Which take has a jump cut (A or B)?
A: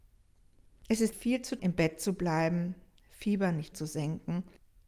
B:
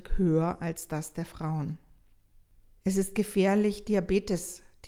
A